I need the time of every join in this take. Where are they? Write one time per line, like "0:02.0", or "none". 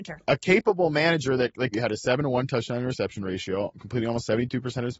0:01.7